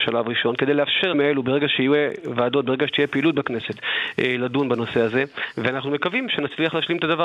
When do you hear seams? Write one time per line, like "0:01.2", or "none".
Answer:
0:01.1